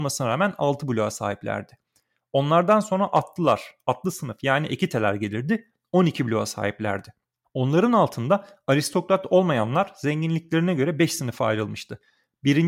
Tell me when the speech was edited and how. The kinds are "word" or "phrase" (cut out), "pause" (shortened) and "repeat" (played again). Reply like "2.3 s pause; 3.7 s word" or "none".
none